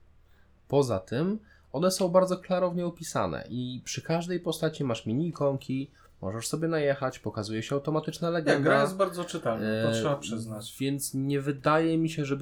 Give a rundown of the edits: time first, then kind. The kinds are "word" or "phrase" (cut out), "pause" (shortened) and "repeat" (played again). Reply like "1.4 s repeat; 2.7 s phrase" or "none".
none